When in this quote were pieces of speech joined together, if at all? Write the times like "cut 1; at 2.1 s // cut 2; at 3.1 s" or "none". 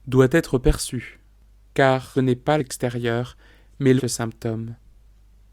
cut 1; at 2.1 s // cut 2; at 2.6 s // cut 3; at 4.0 s